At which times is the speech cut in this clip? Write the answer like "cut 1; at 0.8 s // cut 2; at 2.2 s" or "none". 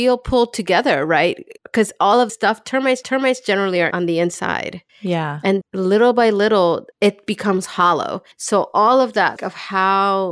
cut 1; at 1.6 s // cut 2; at 2.3 s // cut 3; at 3.0 s // cut 4; at 3.9 s // cut 5; at 4.9 s // cut 6; at 5.6 s // cut 7; at 6.9 s // cut 8; at 8.3 s // cut 9; at 9.4 s